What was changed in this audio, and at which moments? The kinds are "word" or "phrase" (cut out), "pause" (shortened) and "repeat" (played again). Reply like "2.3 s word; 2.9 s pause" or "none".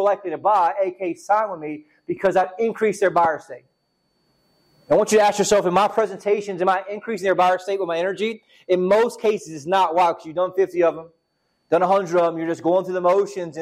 none